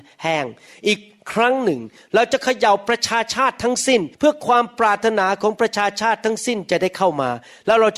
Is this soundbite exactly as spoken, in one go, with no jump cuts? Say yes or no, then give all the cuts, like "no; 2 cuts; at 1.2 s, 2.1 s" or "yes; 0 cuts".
no; 1 cut; at 4.1 s